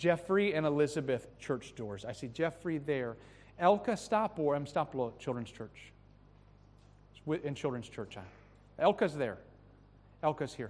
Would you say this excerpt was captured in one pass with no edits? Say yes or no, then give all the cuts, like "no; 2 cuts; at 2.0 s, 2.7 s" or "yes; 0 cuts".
no; 1 cut; at 1.3 s